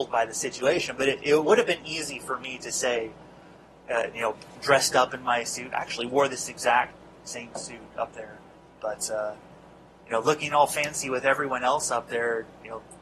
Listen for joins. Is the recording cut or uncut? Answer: uncut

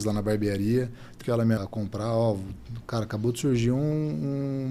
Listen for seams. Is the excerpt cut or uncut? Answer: cut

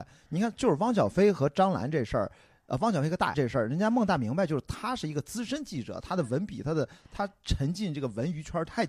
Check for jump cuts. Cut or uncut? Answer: cut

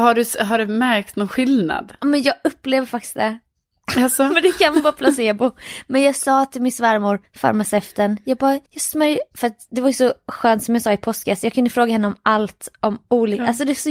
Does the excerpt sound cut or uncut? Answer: cut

